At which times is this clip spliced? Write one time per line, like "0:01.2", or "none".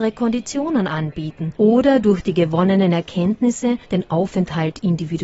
0:01.6
0:03.8